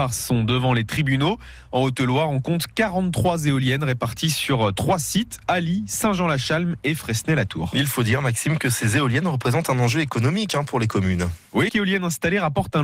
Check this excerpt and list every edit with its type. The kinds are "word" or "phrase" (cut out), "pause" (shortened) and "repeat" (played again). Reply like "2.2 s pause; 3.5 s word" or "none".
11.7 s word

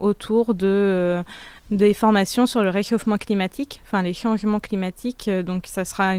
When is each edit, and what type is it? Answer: 1.6 s pause

